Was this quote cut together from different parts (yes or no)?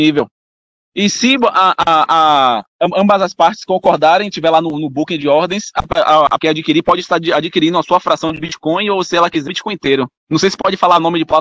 yes